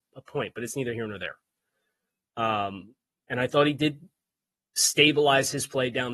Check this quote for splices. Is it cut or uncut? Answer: uncut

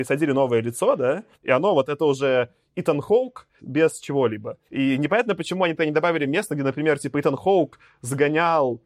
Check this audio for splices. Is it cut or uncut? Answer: cut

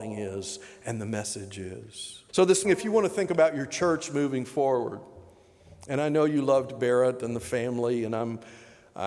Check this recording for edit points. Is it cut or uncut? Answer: cut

